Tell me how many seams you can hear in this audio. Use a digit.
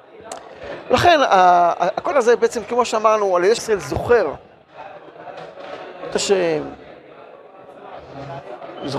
3